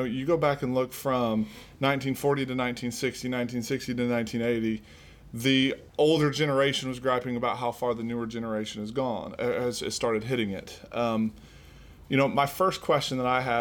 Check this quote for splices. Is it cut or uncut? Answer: cut